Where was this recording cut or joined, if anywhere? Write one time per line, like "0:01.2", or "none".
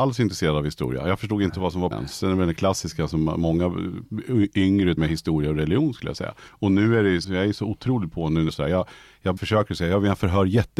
0:01.9
0:05.0
0:06.5
0:07.2
0:08.5
0:09.4